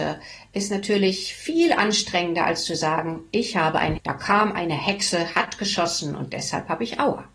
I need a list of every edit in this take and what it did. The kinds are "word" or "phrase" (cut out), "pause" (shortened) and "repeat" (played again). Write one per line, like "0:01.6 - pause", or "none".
0:04.0 - word